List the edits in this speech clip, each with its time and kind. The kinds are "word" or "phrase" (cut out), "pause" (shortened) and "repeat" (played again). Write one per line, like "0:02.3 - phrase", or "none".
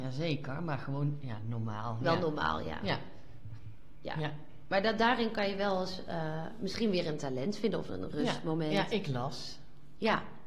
0:07.9 - word